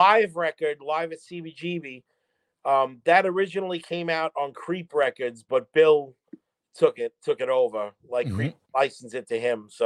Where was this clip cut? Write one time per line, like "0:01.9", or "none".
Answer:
none

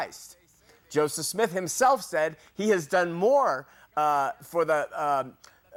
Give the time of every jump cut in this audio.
none

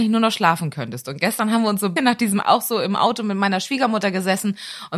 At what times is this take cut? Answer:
0:02.0
0:02.4

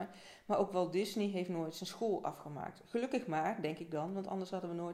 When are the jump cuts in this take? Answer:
none

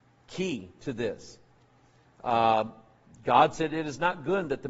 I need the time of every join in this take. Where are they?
none

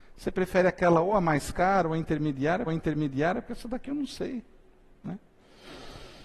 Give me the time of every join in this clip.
0:02.7

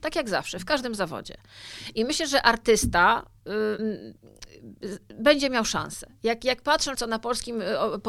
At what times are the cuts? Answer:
0:03.8
0:06.9

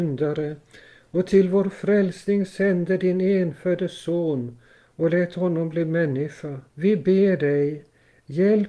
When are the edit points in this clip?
0:06.7

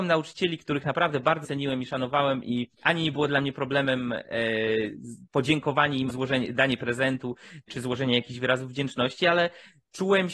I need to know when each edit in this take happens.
0:01.4
0:02.7
0:05.3
0:06.1
0:07.7

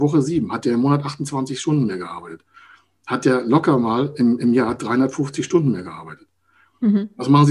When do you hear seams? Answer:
none

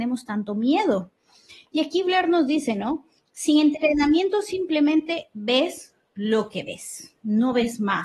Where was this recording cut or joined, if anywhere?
none

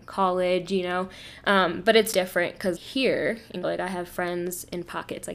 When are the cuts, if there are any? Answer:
0:02.1
0:02.8
0:03.6

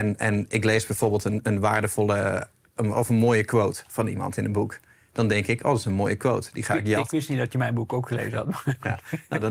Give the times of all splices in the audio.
none

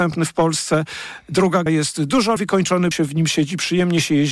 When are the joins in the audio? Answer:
0:01.7
0:02.4
0:02.9

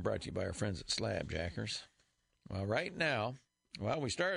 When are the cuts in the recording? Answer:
none

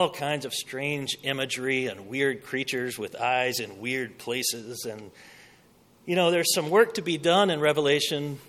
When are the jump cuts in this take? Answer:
none

